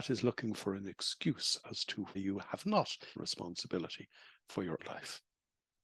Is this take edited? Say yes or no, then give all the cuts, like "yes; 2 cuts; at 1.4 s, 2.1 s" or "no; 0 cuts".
yes; 3 cuts; at 2.1 s, 3.1 s, 4.8 s